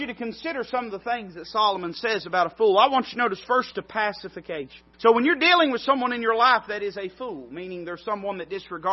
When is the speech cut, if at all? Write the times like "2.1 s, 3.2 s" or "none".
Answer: 3.7 s, 4.9 s